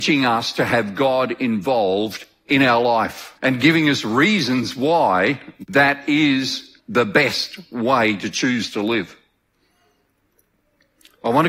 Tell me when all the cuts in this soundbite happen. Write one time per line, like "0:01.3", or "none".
0:03.4
0:06.8